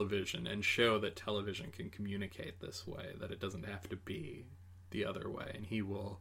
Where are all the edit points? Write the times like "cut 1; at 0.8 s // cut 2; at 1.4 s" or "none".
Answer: none